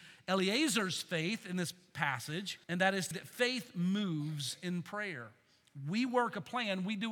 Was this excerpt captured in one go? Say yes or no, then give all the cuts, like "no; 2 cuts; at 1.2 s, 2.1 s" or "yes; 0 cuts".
no; 2 cuts; at 2.6 s, 3.1 s